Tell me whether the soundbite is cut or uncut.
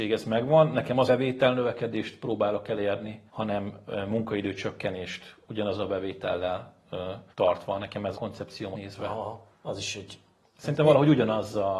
cut